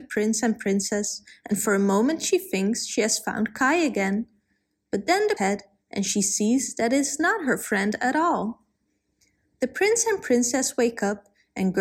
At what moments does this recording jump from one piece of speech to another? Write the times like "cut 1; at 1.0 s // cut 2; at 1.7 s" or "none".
cut 1; at 5.4 s

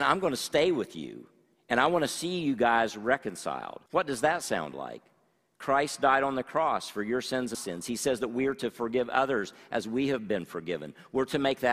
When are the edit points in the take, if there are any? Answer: cut 1; at 3.9 s // cut 2; at 7.5 s

